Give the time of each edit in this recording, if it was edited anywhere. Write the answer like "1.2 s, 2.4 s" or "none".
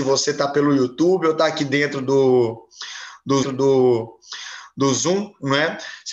3.4 s